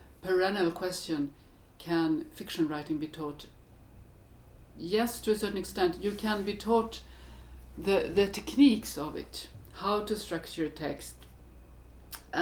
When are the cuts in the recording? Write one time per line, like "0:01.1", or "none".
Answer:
none